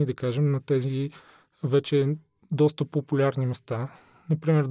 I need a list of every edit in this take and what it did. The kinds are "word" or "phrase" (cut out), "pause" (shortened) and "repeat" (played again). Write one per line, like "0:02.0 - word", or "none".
none